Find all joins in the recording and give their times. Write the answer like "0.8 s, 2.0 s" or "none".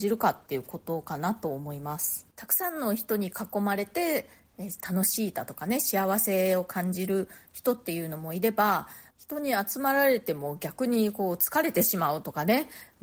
2.3 s, 9.1 s

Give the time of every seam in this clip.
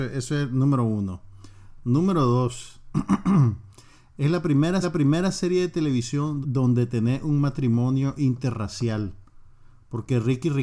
4.8 s, 6.4 s

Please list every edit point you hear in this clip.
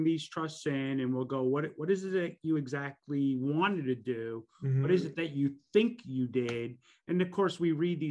none

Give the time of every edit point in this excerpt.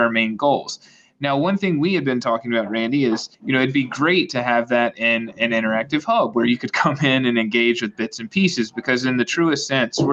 3.3 s

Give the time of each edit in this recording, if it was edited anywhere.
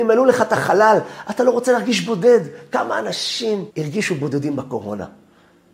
3.7 s

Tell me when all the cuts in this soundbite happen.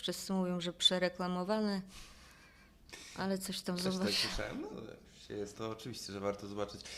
4.7 s, 5.5 s

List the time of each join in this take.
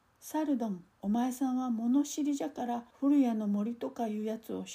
0.9 s, 2.9 s

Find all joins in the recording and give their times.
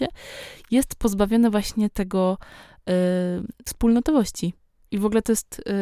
3.7 s

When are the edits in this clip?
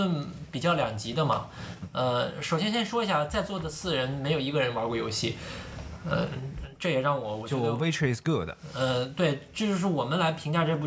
none

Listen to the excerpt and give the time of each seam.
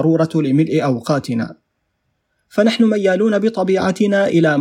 none

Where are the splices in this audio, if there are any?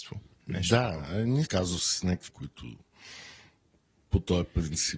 1.4 s, 2.3 s

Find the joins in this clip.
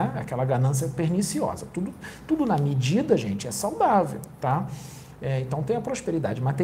none

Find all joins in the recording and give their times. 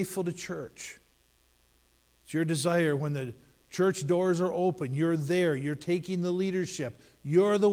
none

